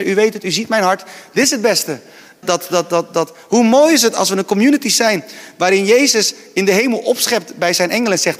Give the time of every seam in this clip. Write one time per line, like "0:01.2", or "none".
0:02.4